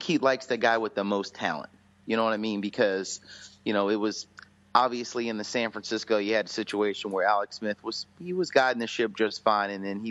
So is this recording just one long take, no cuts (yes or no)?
yes